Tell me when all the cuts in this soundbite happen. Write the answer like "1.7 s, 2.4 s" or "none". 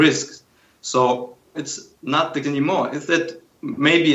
1.5 s, 2.4 s